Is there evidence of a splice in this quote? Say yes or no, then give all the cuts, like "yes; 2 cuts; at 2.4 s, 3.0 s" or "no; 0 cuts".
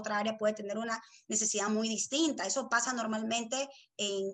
no; 0 cuts